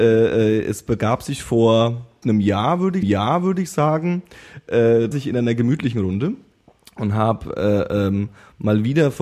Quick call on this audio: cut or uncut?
cut